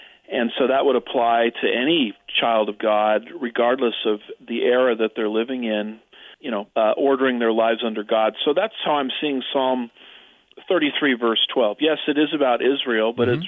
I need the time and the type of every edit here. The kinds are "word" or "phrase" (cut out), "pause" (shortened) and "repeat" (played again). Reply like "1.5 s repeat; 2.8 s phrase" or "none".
6.3 s pause; 6.7 s pause